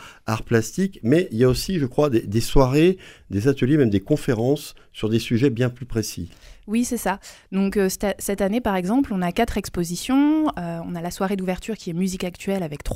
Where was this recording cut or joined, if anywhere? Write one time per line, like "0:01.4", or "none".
none